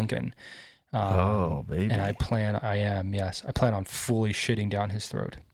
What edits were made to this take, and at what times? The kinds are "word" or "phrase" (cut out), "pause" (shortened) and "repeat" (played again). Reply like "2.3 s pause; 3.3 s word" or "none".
none